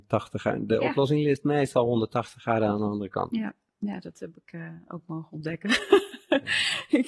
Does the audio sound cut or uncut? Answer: uncut